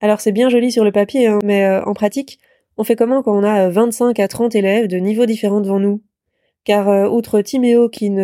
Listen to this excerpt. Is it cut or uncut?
uncut